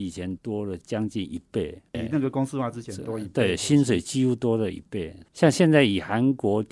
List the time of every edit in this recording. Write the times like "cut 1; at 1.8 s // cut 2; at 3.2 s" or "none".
cut 1; at 5.3 s